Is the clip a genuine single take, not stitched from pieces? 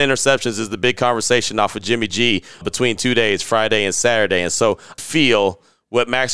no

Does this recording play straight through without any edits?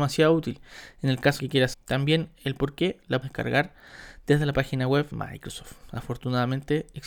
no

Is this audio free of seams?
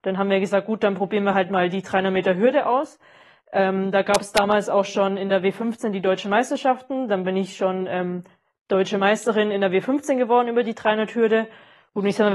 yes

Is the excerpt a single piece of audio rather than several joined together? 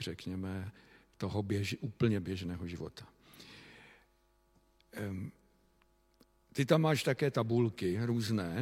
yes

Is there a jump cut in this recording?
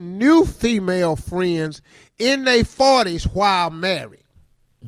no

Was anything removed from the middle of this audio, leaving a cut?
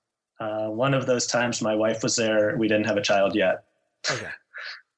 no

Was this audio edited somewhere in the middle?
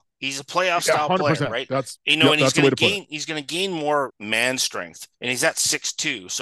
yes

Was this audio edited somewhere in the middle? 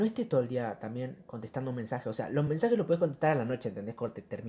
no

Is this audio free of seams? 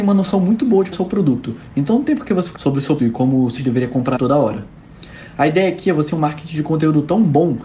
no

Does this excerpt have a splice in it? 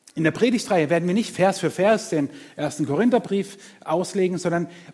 no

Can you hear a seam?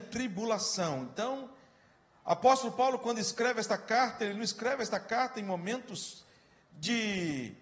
no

